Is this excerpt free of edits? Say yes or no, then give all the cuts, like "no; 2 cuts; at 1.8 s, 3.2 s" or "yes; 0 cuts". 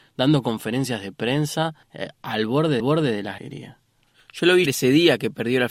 no; 4 cuts; at 1.8 s, 2.8 s, 3.4 s, 4.7 s